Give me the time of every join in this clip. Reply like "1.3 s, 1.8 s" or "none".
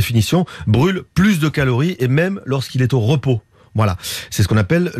none